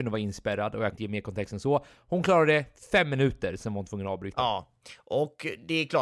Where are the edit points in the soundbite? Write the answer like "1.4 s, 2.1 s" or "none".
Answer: 0.9 s